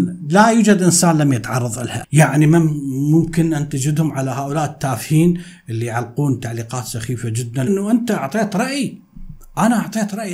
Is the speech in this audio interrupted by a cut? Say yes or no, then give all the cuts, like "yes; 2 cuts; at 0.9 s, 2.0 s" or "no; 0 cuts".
yes; 2 cuts; at 2.0 s, 7.7 s